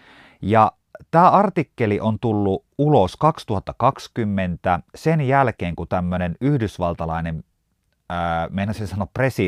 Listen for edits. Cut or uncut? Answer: uncut